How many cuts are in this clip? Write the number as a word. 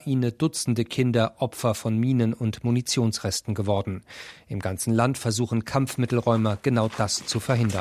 zero